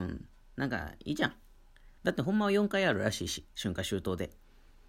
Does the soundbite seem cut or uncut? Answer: cut